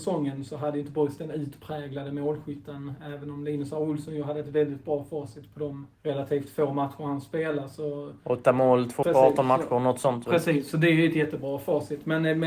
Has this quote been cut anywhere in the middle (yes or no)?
yes